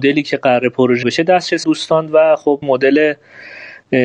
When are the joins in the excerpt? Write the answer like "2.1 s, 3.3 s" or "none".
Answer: 1.0 s, 1.6 s, 2.6 s